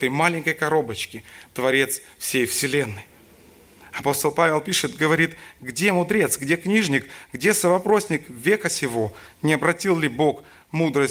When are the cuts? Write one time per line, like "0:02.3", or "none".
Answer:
none